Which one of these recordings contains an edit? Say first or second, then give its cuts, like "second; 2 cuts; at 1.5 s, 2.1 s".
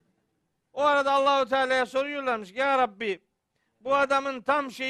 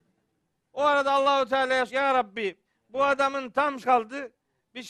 second; 3 cuts; at 1.9 s, 2.6 s, 3.8 s